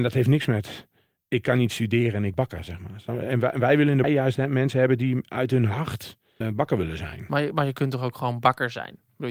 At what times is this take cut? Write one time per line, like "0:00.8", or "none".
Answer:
0:02.3
0:04.0
0:06.4